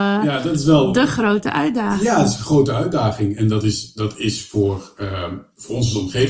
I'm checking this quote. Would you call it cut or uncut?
uncut